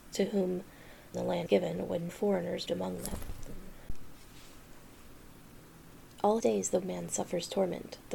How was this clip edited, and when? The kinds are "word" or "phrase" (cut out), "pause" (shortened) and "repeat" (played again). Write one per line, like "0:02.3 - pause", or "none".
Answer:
0:01.1 - word
0:01.5 - word
0:02.1 - word
0:02.7 - word
0:06.4 - word
0:06.8 - word